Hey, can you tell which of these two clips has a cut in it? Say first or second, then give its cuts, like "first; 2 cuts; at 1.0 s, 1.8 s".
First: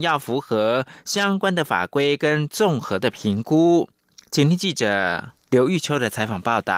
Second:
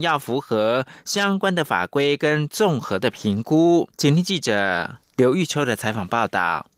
second; 1 cut; at 3.9 s